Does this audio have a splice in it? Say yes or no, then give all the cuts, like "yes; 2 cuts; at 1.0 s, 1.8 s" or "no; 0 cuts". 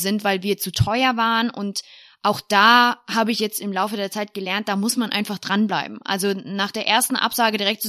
no; 0 cuts